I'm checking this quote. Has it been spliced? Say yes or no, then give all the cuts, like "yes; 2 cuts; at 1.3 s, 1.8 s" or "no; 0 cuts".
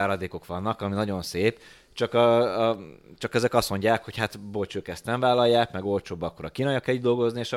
no; 0 cuts